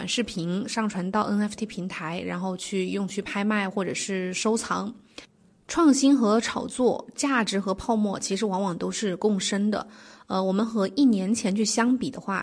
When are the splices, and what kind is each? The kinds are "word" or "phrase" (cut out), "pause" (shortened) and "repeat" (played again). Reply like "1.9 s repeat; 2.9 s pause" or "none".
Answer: none